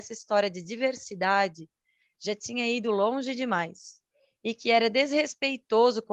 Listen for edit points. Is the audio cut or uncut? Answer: uncut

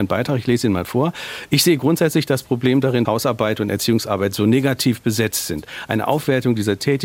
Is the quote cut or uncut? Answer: cut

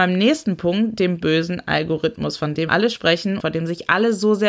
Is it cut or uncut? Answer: cut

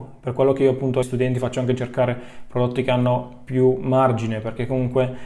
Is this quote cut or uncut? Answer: cut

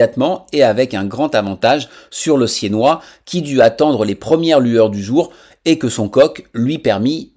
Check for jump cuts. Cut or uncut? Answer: uncut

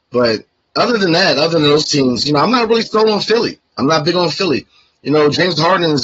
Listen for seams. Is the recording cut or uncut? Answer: uncut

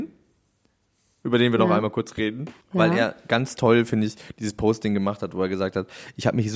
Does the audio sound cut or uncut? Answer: cut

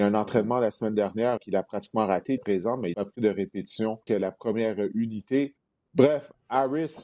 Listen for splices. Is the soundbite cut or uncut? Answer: cut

